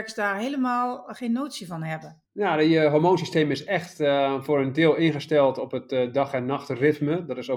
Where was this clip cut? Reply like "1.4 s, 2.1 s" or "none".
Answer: 2.3 s